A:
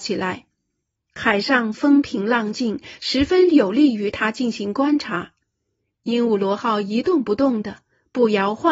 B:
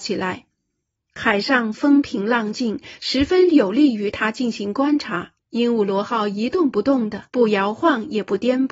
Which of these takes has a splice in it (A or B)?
B